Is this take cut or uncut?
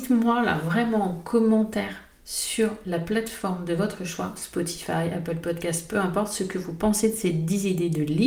uncut